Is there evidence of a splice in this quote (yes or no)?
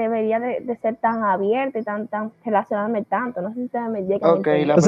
no